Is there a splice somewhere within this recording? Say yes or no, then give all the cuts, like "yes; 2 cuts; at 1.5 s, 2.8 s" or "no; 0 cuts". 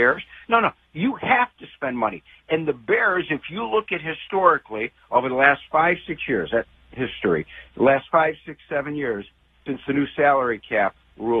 no; 0 cuts